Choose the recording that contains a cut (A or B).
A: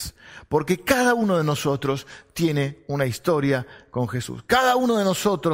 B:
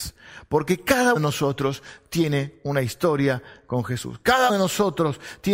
B